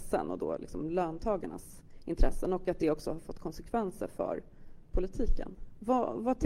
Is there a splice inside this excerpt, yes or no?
no